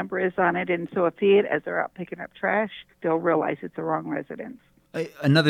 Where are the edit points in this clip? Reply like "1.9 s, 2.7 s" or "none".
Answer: 1.2 s, 2.9 s, 3.7 s